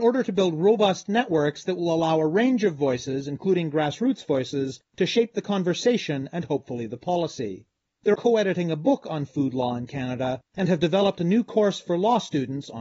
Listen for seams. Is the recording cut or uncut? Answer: cut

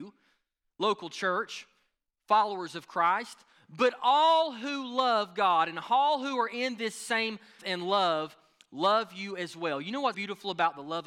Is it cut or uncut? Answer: cut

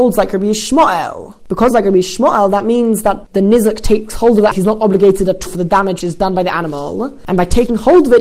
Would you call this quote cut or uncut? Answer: cut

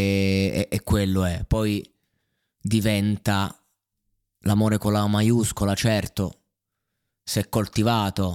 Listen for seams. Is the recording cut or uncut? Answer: uncut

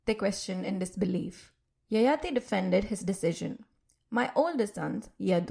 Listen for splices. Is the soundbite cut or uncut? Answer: cut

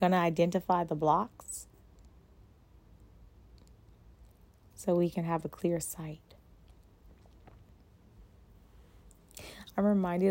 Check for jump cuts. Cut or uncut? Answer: uncut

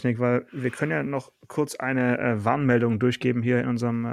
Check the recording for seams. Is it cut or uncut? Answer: uncut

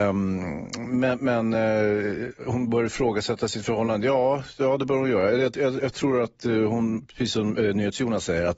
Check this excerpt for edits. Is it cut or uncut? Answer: uncut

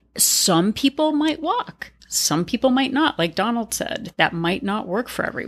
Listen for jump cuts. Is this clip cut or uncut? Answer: uncut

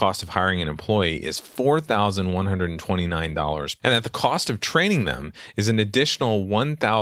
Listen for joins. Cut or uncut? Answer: cut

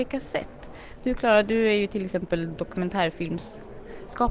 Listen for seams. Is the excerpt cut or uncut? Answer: uncut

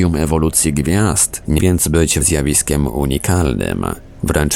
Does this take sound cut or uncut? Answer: cut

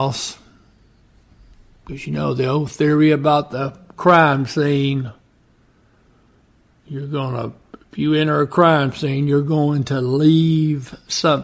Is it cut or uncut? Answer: uncut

